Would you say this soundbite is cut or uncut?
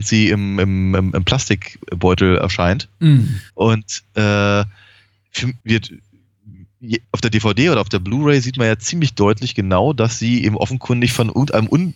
cut